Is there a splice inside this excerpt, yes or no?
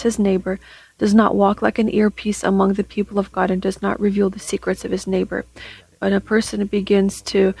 no